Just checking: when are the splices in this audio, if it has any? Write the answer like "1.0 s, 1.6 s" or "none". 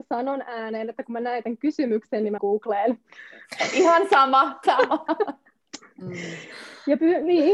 2.4 s, 4.6 s

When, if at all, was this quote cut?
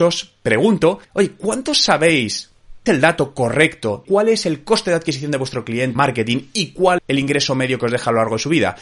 1.0 s, 2.9 s, 4.0 s, 6.0 s, 7.0 s

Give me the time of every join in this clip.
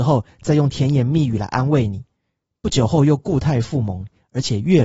none

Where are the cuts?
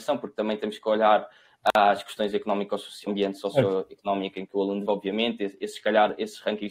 3.1 s, 4.9 s

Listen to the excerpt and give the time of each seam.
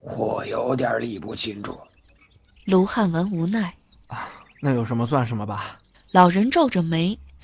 none

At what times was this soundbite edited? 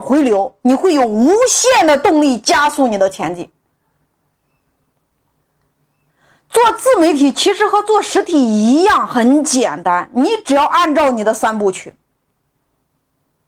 none

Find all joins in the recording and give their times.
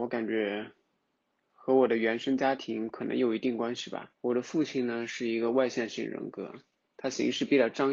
4.2 s

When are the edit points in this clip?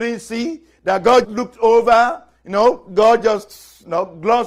1.2 s

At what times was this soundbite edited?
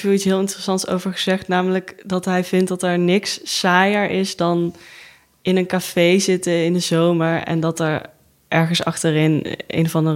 none

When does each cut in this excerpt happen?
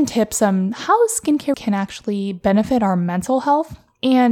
1.5 s

